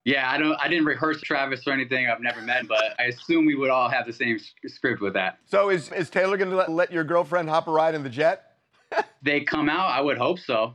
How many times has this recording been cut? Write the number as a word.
six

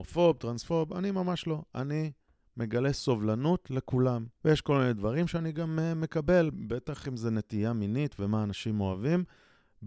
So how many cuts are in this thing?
one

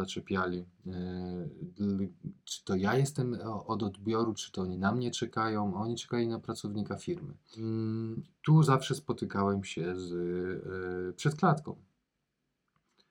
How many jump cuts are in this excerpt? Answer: zero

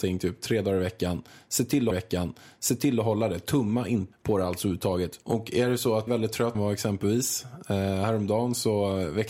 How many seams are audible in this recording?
five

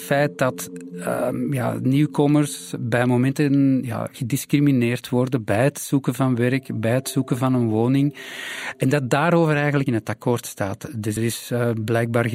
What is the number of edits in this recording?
two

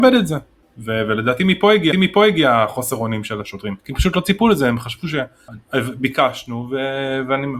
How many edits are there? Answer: two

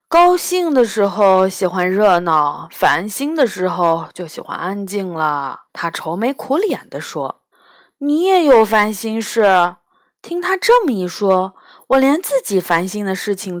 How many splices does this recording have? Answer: two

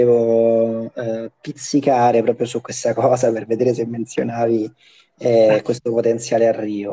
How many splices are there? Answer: zero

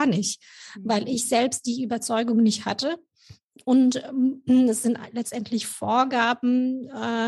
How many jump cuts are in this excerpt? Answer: zero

